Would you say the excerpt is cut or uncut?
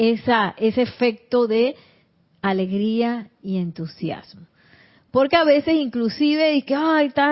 uncut